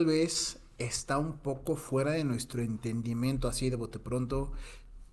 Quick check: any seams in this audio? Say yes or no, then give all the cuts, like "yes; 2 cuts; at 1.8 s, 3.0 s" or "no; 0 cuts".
no; 0 cuts